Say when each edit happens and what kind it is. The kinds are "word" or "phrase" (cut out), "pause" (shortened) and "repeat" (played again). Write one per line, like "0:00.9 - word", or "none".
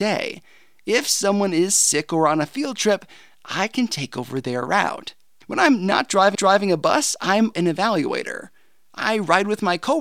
0:06.3 - repeat
0:07.5 - word